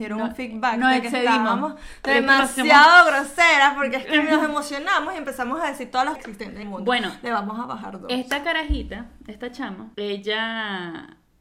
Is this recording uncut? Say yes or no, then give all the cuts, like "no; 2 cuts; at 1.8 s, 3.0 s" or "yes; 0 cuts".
no; 3 cuts; at 6.2 s, 6.6 s, 9.9 s